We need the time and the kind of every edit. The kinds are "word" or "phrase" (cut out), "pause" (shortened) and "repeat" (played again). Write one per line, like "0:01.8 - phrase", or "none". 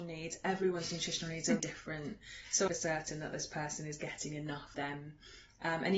0:01.6 - word
0:02.7 - phrase
0:04.7 - word